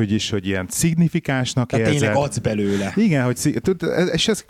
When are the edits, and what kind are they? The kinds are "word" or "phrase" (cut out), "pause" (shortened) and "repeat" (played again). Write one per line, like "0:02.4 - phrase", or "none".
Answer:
none